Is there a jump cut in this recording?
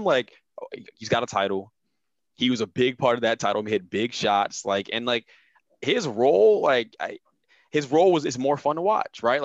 no; 0 cuts

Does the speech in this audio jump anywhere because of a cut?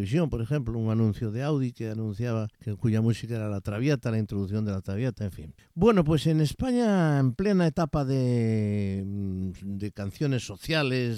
yes; 2 cuts; at 2.5 s, 5.6 s

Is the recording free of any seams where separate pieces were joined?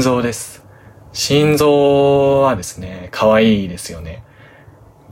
yes; 0 cuts

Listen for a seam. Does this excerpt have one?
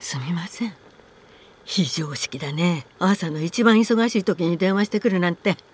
yes; 1 cut; at 2.9 s

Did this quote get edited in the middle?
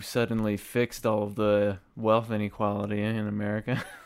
no; 0 cuts

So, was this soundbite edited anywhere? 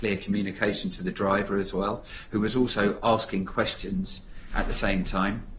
no; 0 cuts

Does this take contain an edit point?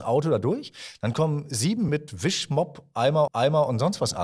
yes; 2 cuts; at 1.9 s, 3.3 s

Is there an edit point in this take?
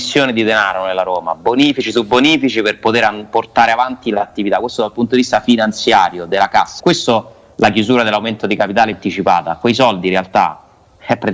yes; 2 cuts; at 6.8 s, 8.9 s

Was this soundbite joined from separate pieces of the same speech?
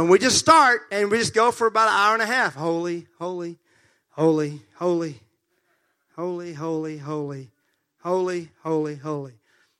no; 0 cuts

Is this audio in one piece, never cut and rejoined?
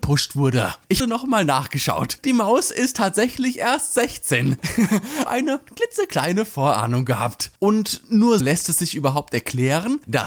no; 4 cuts; at 1.0 s, 5.3 s, 7.6 s, 8.4 s

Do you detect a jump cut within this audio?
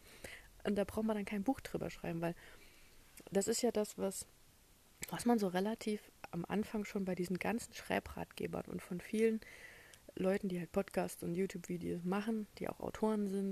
no; 0 cuts

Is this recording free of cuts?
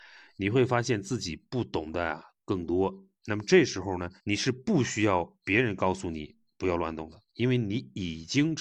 no; 4 cuts; at 3.1 s, 4.2 s, 5.4 s, 7.3 s

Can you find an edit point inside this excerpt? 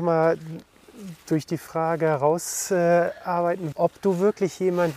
yes; 1 cut; at 3.7 s

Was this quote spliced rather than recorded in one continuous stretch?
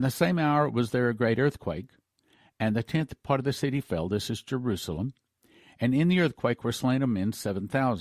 no; 0 cuts

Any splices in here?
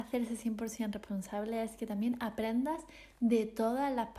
no; 0 cuts

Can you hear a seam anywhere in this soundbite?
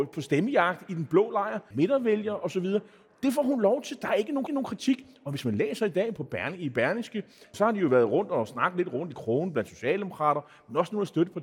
yes; 4 cuts; at 1.7 s, 4.5 s, 6.2 s, 7.5 s

